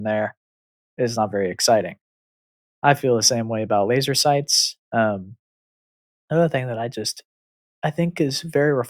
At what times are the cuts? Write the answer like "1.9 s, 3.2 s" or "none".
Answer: none